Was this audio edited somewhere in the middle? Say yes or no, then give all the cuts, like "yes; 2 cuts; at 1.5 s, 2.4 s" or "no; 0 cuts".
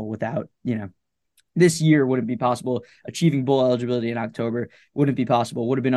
no; 0 cuts